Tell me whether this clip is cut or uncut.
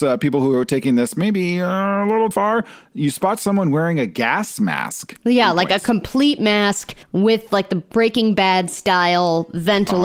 cut